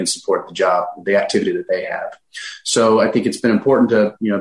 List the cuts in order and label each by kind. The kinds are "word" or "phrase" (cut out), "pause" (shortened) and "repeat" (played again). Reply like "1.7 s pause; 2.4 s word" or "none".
none